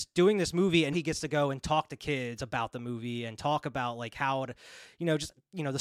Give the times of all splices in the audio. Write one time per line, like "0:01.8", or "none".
0:00.9